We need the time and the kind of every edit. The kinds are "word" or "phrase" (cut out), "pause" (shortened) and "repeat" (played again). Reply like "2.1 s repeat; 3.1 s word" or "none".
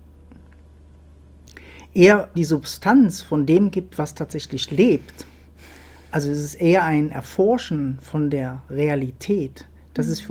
2.4 s word

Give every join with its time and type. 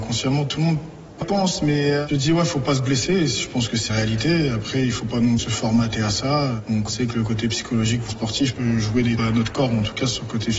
1.2 s word; 2.1 s word; 3.9 s word; 5.4 s word; 6.9 s word; 8.1 s word; 8.6 s word; 9.2 s word

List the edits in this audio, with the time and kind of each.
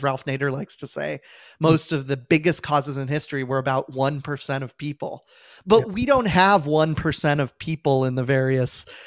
none

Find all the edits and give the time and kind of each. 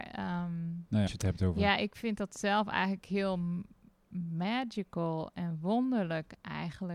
1.1 s phrase

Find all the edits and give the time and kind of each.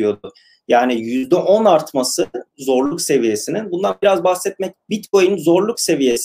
2.5 s word; 4.7 s word

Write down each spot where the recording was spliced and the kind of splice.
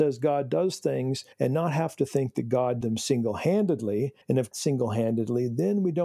1.3 s pause; 2.8 s word; 4.2 s pause; 4.5 s phrase

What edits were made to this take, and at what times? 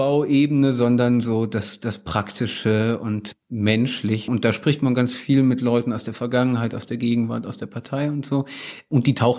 none

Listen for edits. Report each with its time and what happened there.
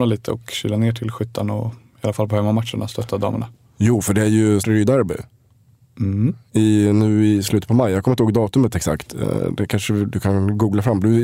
4.6 s word

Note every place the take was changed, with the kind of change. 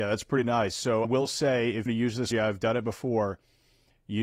1.0 s word; 1.9 s phrase; 2.3 s word

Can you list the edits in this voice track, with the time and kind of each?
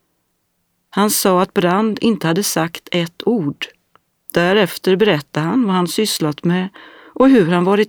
4.1 s pause

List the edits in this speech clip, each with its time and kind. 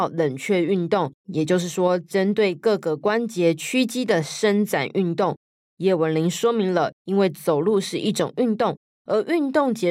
1.2 s pause

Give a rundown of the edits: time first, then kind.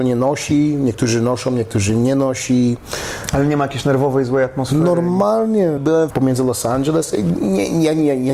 5.8 s word; 6.1 s phrase

